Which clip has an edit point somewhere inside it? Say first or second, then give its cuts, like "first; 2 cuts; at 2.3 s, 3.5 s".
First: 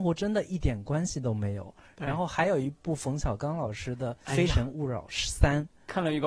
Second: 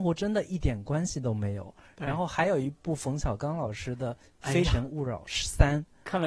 first; 1 cut; at 4.2 s